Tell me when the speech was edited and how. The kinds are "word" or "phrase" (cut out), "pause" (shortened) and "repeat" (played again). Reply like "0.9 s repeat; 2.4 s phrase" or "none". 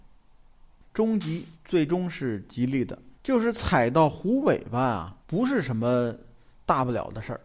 1.5 s pause; 3.1 s pause; 5.2 s pause